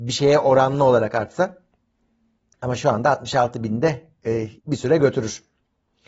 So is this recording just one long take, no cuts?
no; 1 cut; at 4.6 s

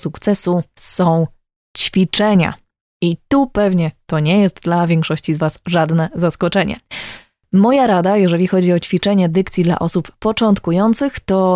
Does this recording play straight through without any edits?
yes; 0 cuts

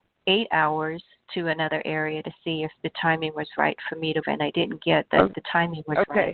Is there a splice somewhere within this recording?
yes; 1 cut; at 4.2 s

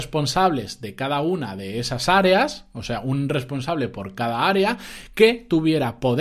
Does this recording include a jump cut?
no; 0 cuts

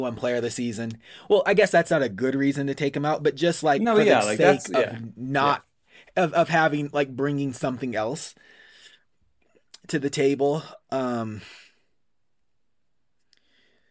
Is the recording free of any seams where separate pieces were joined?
yes; 0 cuts

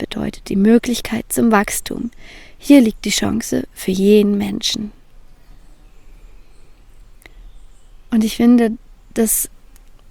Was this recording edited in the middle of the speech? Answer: no; 0 cuts

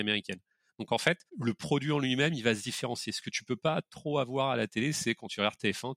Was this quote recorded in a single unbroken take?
no; 1 cut; at 1.3 s

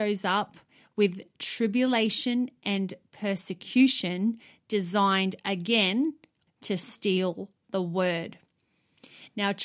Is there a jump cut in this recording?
yes; 1 cut; at 6.5 s

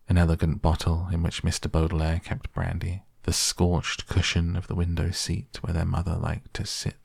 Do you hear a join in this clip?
yes; 1 cut; at 3.1 s

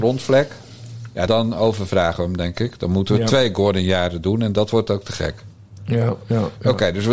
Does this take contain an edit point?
yes; 1 cut; at 1.3 s

